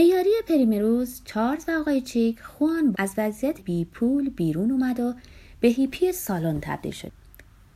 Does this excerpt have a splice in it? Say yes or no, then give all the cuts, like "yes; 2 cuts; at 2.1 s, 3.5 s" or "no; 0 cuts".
yes; 2 cuts; at 2.9 s, 3.6 s